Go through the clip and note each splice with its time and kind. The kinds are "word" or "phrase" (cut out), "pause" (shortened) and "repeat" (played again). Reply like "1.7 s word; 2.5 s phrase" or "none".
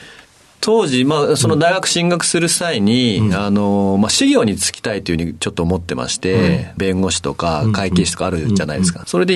6.8 s phrase